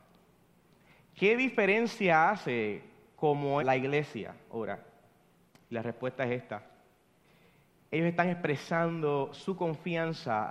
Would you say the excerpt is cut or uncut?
cut